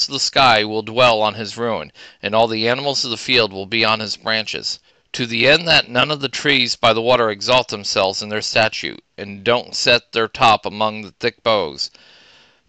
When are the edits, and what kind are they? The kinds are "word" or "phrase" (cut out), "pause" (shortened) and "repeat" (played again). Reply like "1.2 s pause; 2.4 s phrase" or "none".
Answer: 4.9 s pause